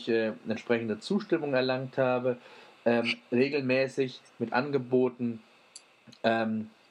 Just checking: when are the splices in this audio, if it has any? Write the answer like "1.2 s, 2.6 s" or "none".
none